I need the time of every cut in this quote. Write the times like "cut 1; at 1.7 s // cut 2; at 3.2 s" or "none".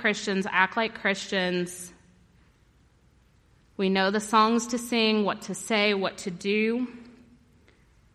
none

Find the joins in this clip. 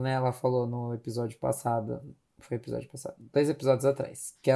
none

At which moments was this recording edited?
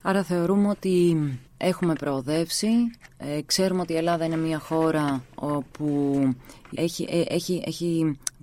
cut 1; at 1.5 s // cut 2; at 6.7 s

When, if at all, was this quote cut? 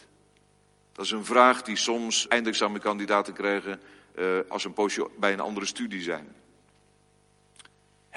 cut 1; at 2.3 s

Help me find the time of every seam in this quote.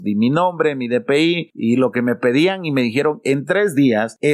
none

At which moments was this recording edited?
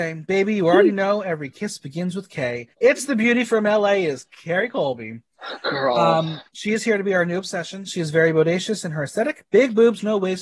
cut 1; at 2.7 s // cut 2; at 6.5 s

